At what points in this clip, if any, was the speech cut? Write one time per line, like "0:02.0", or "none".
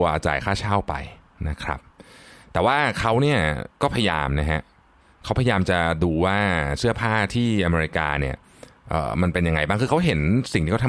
none

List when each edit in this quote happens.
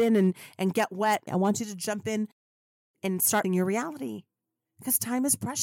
0:01.3
0:03.0
0:03.4

